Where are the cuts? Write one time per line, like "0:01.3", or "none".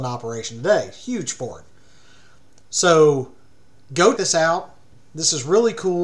0:04.2